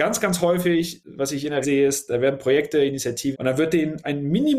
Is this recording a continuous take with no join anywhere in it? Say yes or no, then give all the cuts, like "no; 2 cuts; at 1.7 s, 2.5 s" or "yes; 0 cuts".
no; 2 cuts; at 1.6 s, 3.3 s